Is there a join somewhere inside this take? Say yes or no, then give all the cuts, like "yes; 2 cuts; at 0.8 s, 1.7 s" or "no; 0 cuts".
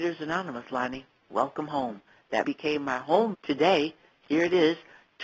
yes; 2 cuts; at 2.4 s, 3.3 s